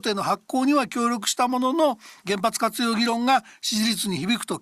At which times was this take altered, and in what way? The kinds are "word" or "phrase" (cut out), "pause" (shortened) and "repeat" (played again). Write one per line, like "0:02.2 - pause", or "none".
0:02.2 - pause